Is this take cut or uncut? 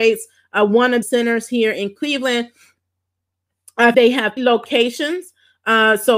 cut